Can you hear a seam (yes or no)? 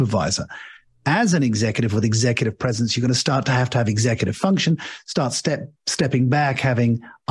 no